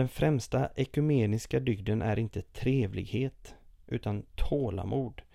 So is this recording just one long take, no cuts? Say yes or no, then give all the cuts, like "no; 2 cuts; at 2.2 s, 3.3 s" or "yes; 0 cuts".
yes; 0 cuts